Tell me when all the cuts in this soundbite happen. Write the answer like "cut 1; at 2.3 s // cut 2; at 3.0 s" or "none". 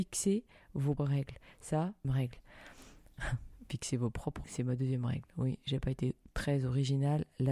cut 1; at 1.0 s // cut 2; at 2.0 s // cut 3; at 4.4 s